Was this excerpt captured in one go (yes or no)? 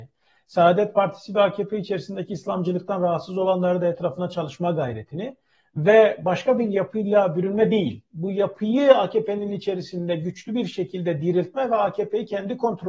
yes